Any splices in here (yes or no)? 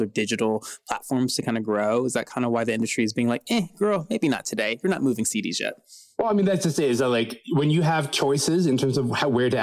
no